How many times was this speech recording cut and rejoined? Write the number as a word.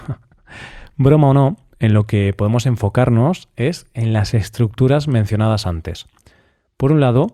zero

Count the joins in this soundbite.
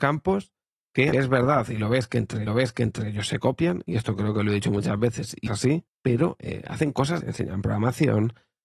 five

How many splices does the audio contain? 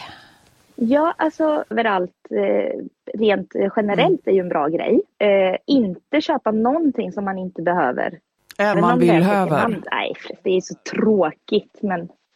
three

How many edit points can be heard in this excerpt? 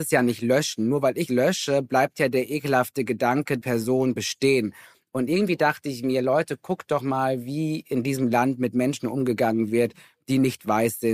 three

